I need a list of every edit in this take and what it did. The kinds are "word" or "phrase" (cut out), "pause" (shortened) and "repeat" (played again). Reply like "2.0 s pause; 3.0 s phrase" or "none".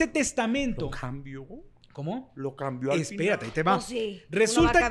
none